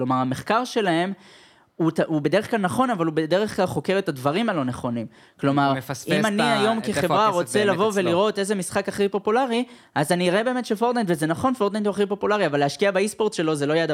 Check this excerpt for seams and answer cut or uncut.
uncut